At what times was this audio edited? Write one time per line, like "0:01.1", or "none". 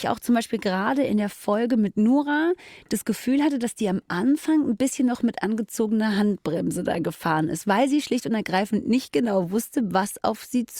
none